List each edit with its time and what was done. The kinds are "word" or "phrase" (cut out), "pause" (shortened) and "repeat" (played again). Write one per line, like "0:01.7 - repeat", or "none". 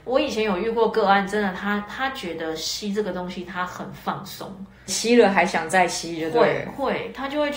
0:04.9 - word